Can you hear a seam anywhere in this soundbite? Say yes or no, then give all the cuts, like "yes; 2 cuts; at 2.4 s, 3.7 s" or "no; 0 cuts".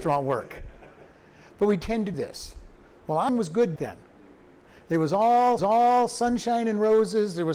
yes; 4 cuts; at 2.1 s, 3.3 s, 3.8 s, 5.6 s